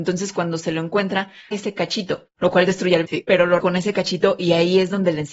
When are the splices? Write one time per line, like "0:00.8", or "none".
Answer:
0:01.5
0:02.3
0:03.0
0:03.6